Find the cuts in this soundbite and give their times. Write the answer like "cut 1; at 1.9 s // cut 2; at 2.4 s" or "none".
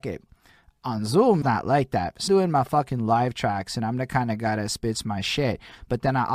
cut 1; at 1.4 s // cut 2; at 2.3 s